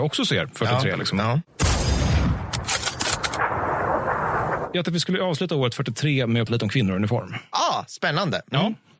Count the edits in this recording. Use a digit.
2